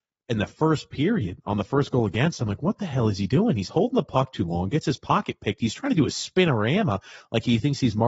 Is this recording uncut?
yes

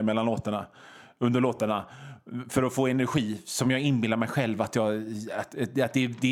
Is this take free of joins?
yes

